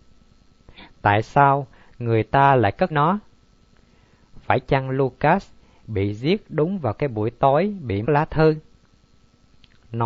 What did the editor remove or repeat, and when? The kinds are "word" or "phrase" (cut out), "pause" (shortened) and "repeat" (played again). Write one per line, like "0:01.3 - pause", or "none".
0:02.9 - word
0:08.0 - word